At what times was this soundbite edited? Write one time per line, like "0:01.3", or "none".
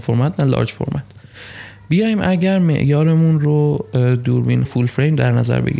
0:04.6